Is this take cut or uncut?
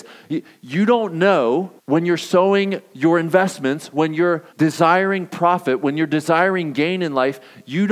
cut